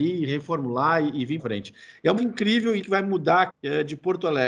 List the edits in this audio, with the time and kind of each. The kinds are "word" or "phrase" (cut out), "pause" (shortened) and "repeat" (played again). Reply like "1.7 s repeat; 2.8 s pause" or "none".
1.4 s word; 2.2 s word; 2.8 s word; 3.5 s word